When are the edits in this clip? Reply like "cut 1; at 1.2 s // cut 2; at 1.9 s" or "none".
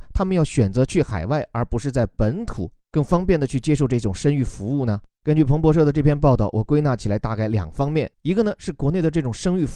cut 1; at 8.1 s